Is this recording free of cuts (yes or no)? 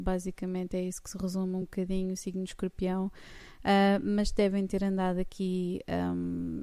yes